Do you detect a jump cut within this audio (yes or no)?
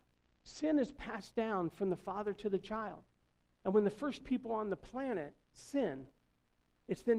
yes